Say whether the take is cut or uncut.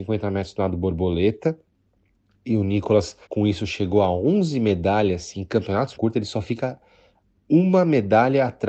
cut